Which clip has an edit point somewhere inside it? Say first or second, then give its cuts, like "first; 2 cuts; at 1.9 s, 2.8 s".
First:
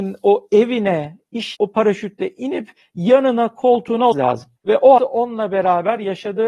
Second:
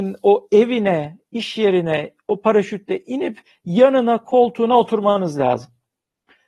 first; 4 cuts; at 1.5 s, 4.1 s, 4.6 s, 5.0 s